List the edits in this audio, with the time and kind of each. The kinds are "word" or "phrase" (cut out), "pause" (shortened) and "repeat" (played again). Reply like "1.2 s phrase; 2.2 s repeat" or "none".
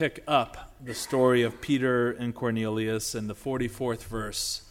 none